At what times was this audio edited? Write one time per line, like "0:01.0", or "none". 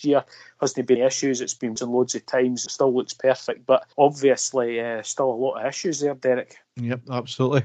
0:01.0
0:01.8
0:02.7
0:03.9
0:06.6